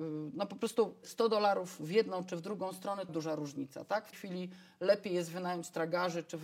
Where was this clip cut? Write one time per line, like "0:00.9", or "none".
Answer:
0:01.0
0:03.1
0:04.1